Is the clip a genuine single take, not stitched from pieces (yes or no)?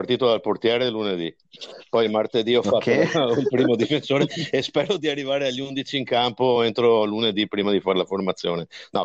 yes